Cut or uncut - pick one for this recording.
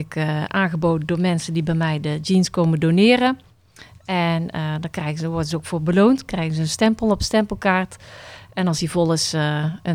uncut